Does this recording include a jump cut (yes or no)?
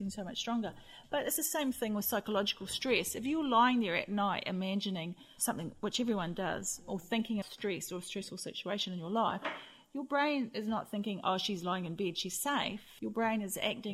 yes